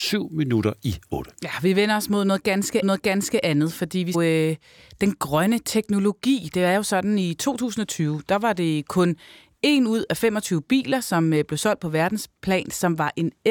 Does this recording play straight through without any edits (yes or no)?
no